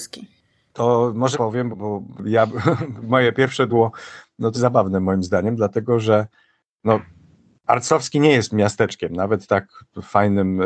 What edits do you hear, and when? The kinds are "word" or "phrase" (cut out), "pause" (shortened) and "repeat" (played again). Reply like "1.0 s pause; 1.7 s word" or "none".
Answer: 1.3 s word; 1.7 s word; 3.0 s word; 3.7 s word; 4.5 s word; 9.5 s word